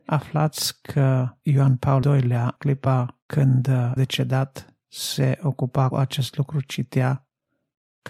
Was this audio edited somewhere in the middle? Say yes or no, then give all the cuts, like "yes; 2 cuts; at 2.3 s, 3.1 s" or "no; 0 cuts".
yes; 5 cuts; at 1.4 s, 2.0 s, 2.6 s, 4.0 s, 5.9 s